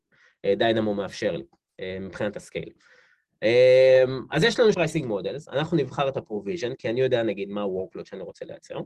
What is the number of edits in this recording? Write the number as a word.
one